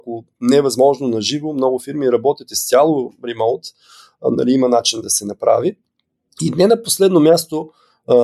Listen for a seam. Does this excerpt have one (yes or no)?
no